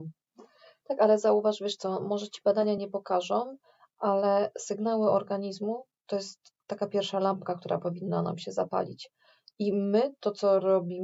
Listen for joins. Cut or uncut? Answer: uncut